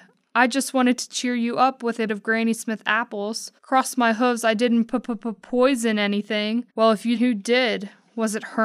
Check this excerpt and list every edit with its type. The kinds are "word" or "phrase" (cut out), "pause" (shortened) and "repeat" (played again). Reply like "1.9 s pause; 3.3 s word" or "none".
2.1 s word; 3.6 s pause; 6.7 s pause; 7.2 s phrase